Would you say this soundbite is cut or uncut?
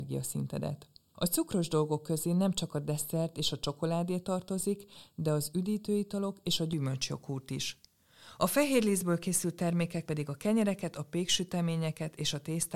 cut